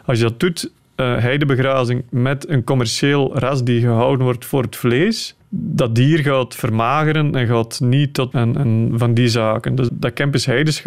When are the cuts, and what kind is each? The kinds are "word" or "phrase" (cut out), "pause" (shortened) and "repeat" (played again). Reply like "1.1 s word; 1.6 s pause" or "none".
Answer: 5.4 s pause; 8.3 s phrase; 9.9 s word